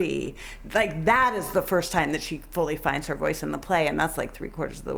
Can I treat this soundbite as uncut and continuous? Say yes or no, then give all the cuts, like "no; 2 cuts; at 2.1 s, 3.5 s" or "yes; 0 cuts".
yes; 0 cuts